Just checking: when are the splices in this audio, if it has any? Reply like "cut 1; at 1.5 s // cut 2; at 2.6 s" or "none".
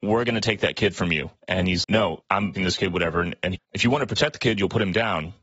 cut 1; at 1.8 s // cut 2; at 2.6 s // cut 3; at 3.6 s